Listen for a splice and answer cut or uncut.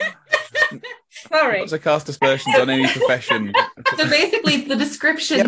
cut